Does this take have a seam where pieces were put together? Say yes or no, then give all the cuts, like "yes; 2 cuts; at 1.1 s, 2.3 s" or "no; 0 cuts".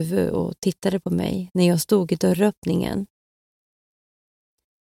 no; 0 cuts